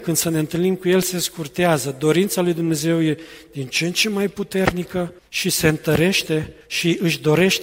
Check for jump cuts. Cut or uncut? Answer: cut